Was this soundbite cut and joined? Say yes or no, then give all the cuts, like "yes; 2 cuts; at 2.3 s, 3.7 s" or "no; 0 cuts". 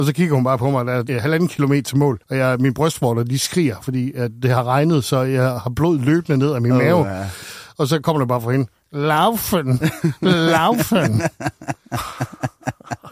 yes; 2 cuts; at 1.1 s, 2.2 s